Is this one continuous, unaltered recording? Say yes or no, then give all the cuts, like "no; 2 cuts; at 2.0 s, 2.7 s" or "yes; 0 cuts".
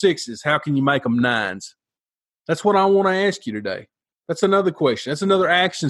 yes; 0 cuts